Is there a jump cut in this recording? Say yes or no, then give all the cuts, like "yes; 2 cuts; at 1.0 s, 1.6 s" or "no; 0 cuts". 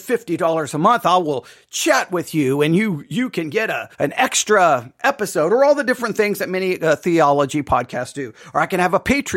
yes; 1 cut; at 3.9 s